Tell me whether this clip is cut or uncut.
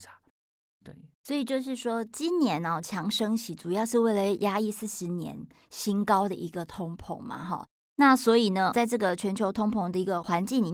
cut